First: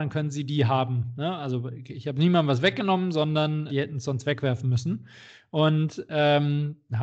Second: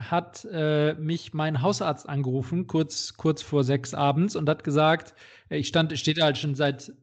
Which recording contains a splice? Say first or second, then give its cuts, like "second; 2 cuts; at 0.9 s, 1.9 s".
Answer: first; 1 cut; at 3.7 s